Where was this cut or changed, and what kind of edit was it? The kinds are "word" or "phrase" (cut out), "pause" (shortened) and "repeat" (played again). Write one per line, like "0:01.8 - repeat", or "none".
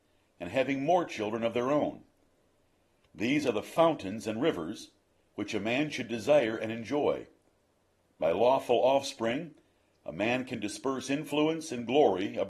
none